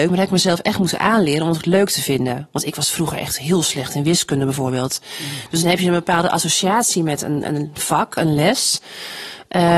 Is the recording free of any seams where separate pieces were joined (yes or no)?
yes